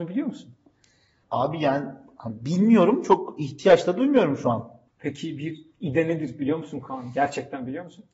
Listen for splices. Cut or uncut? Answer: uncut